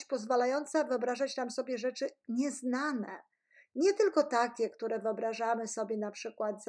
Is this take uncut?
yes; 0 cuts

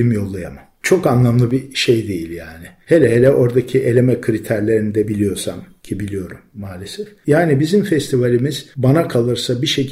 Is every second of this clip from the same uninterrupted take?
yes; 0 cuts

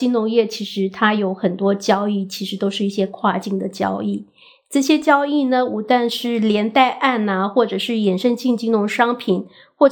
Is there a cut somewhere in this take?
no; 0 cuts

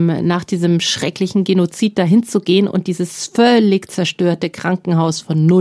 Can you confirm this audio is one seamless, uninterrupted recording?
yes; 0 cuts

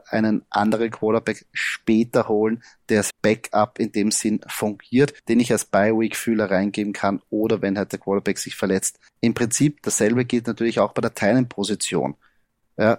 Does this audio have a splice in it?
yes; 3 cuts; at 3.1 s, 5.2 s, 9.1 s

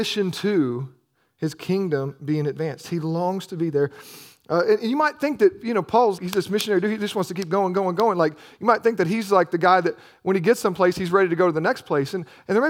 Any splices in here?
yes; 1 cut; at 6.2 s

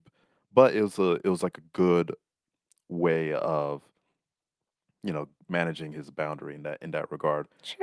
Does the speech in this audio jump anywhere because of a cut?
no; 0 cuts

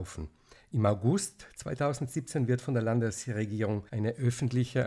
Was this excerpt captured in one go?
no; 1 cut; at 3.9 s

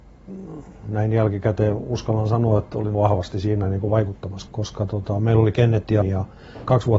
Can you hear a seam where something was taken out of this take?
yes; 3 cuts; at 2.9 s, 4.5 s, 6.0 s

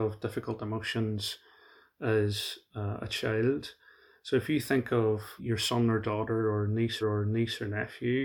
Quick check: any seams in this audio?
yes; 2 cuts; at 5.4 s, 7.0 s

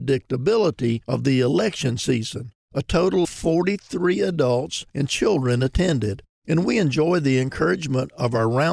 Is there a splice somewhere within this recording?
yes; 2 cuts; at 2.6 s, 3.2 s

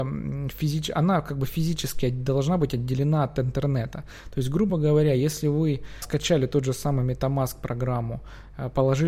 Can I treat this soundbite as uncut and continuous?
yes; 0 cuts

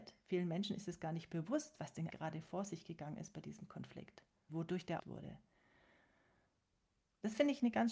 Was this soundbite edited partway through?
yes; 3 cuts; at 2.1 s, 4.5 s, 5.0 s

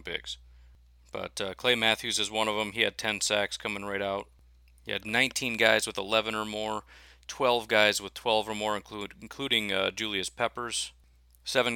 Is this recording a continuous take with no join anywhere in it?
yes; 0 cuts

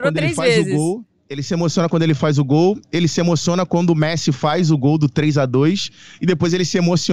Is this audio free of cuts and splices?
yes; 0 cuts

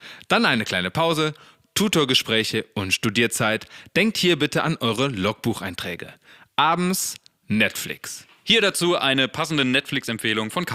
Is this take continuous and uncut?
yes; 0 cuts

